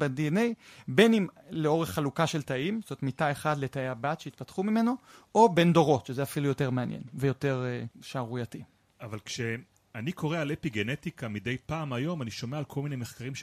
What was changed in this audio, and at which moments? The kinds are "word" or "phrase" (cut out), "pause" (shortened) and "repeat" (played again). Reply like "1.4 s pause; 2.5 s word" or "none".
none